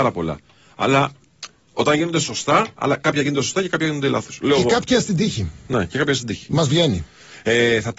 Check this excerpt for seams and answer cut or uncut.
uncut